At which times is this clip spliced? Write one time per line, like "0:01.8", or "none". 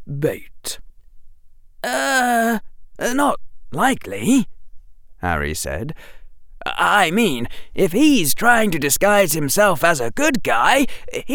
none